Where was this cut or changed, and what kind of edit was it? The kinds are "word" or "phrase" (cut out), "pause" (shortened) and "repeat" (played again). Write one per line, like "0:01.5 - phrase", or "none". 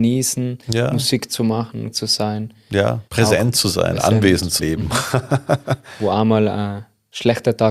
0:01.9 - word
0:03.1 - pause
0:04.6 - phrase